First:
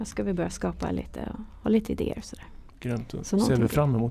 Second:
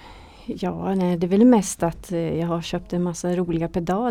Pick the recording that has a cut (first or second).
first